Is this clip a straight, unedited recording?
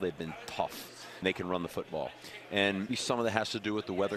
no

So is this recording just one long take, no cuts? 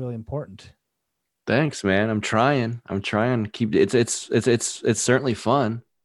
no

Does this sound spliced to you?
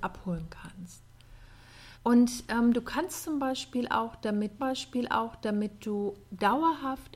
yes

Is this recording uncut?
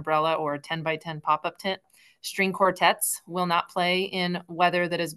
yes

